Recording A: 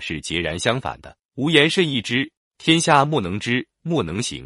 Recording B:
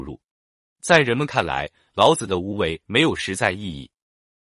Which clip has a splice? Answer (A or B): A